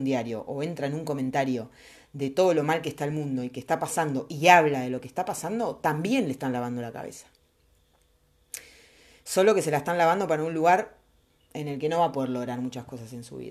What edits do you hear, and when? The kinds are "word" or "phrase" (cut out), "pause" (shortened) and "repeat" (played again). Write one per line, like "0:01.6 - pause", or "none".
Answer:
none